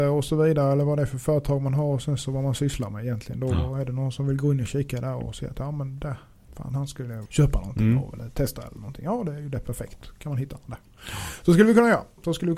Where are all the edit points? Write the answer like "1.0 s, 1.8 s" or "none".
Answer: 7.3 s